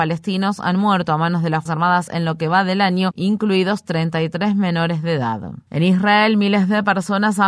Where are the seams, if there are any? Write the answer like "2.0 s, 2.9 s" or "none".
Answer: 1.7 s, 2.1 s